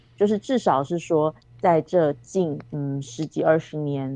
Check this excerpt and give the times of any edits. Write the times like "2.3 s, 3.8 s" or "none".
2.7 s